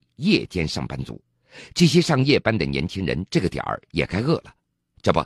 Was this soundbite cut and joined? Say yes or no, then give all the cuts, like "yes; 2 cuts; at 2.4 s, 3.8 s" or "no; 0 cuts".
yes; 1 cut; at 1.2 s